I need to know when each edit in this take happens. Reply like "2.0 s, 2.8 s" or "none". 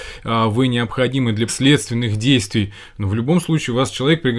1.5 s